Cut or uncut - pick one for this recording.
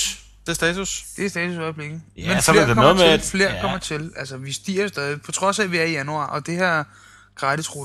uncut